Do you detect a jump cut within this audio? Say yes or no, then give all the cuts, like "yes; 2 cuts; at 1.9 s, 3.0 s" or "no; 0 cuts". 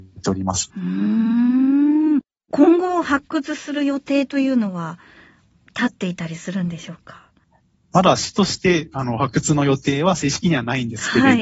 no; 0 cuts